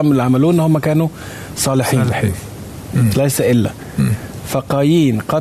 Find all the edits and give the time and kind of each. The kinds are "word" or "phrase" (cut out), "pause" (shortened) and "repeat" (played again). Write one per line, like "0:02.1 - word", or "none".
none